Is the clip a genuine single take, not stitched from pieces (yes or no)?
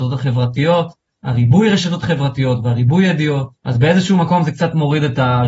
no